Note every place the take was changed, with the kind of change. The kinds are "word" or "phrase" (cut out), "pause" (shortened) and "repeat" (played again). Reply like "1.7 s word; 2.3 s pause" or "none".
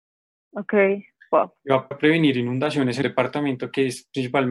1.9 s word; 3.0 s word